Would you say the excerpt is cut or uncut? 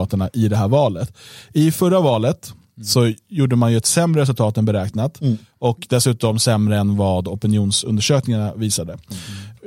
uncut